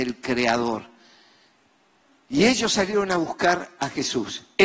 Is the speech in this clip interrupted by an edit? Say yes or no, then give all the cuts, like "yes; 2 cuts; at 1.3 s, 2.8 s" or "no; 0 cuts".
no; 0 cuts